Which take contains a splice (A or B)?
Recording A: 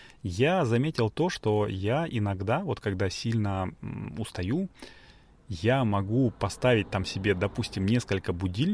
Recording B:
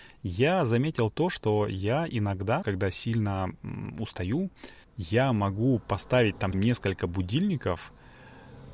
B